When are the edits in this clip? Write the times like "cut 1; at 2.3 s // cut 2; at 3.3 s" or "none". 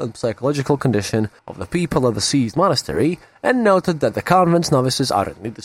cut 1; at 1.4 s